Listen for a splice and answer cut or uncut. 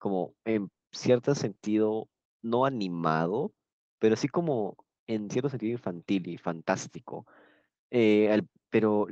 uncut